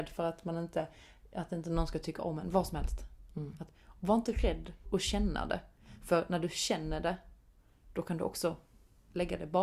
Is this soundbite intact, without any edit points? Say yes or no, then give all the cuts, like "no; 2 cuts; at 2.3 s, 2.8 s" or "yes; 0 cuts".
no; 1 cut; at 4.8 s